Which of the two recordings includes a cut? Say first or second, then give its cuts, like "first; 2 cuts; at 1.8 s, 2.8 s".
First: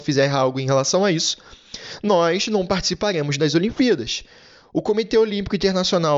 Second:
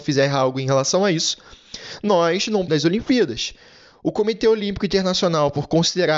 second; 1 cut; at 2.7 s